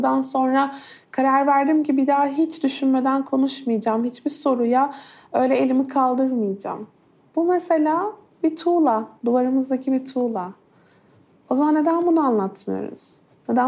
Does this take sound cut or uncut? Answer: uncut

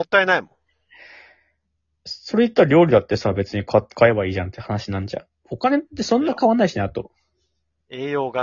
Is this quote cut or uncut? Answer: uncut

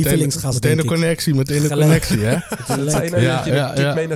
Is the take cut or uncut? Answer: uncut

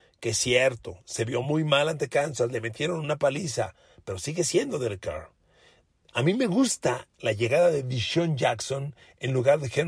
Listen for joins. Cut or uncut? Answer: uncut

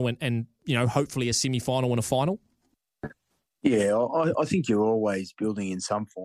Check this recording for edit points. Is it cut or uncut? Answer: uncut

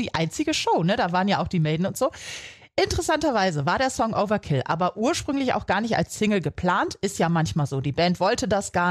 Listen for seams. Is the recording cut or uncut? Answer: uncut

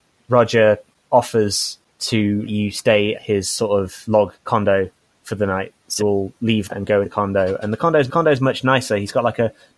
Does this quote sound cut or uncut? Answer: cut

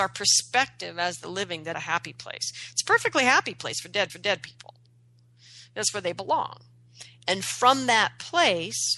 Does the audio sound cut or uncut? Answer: cut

